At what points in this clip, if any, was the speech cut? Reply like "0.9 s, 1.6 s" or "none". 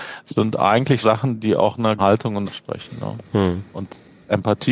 1.0 s, 2.0 s, 2.4 s